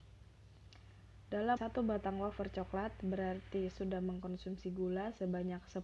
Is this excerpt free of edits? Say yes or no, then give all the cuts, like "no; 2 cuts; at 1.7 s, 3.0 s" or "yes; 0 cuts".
no; 2 cuts; at 1.6 s, 3.7 s